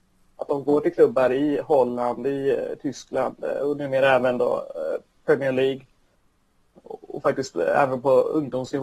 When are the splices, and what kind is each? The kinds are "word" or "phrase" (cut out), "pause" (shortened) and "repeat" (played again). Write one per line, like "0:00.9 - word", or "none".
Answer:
none